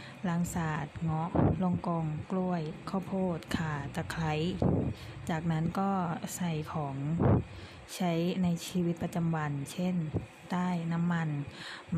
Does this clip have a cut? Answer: yes; 1 cut; at 2.8 s

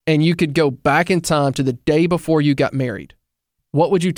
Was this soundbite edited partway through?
no; 0 cuts

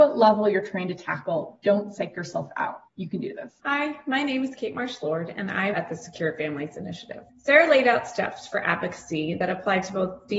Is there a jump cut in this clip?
yes; 4 cuts; at 2.9 s, 3.6 s, 5.7 s, 7.3 s

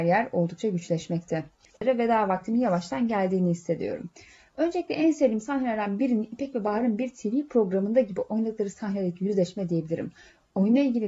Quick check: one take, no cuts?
yes; 0 cuts

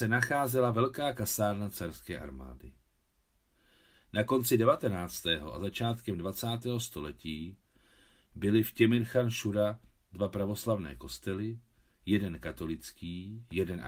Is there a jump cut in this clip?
no; 0 cuts

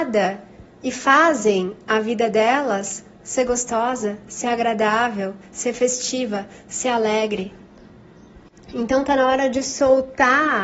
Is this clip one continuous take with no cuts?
yes; 0 cuts

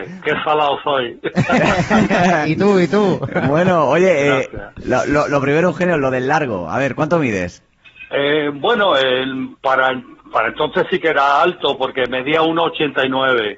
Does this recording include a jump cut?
no; 0 cuts

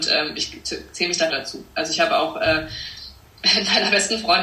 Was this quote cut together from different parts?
yes; 1 cut; at 1.3 s

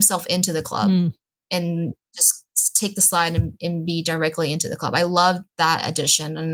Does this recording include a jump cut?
no; 0 cuts

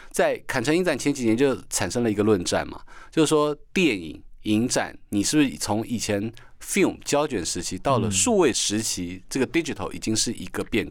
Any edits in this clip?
no; 0 cuts

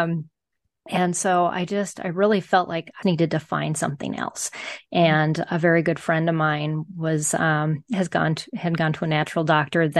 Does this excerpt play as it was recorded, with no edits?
no; 1 cut; at 3.0 s

